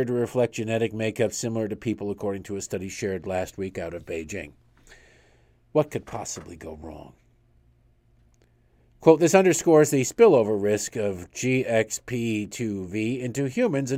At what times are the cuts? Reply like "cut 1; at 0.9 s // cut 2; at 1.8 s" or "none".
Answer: none